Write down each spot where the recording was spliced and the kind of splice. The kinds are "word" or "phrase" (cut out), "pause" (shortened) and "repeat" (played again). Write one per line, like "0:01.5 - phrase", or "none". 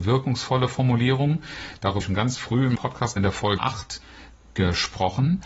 0:02.0 - word
0:02.8 - word
0:03.2 - word
0:03.6 - word